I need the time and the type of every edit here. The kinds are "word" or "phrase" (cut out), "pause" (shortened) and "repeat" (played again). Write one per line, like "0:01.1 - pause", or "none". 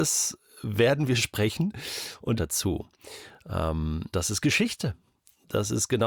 0:02.3 - phrase
0:04.1 - word